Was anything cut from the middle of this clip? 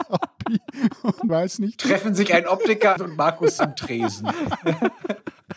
yes; 3 cuts; at 1.3 s, 3.0 s, 3.6 s

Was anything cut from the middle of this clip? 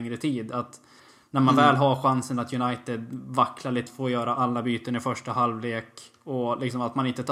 yes; 1 cut; at 3.9 s

